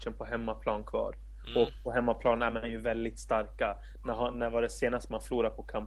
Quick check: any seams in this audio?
no; 0 cuts

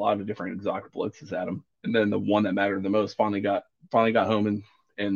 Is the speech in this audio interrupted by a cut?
yes; 1 cut; at 1.7 s

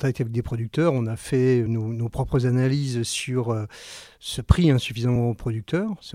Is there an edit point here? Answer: no; 0 cuts

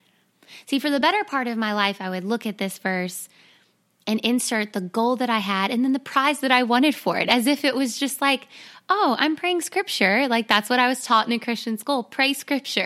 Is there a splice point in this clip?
no; 0 cuts

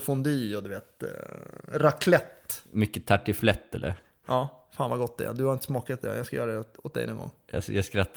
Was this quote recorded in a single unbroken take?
yes; 0 cuts

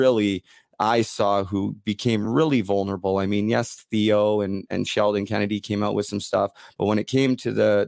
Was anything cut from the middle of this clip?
no; 0 cuts

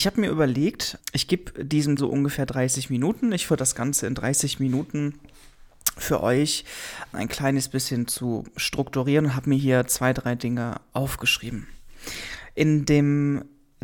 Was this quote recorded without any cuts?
no; 4 cuts; at 1.0 s, 2.0 s, 3.5 s, 7.1 s

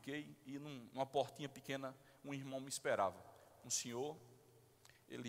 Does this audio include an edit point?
no; 0 cuts

